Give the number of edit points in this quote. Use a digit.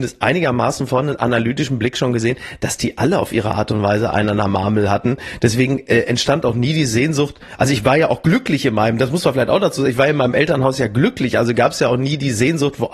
0